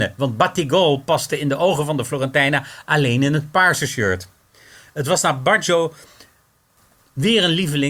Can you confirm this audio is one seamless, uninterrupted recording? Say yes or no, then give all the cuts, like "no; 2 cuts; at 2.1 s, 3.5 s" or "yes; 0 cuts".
yes; 0 cuts